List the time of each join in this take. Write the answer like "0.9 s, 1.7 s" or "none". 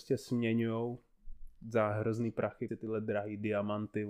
1.6 s, 2.7 s